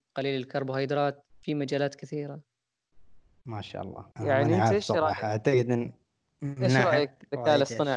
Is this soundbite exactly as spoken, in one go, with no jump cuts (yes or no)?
no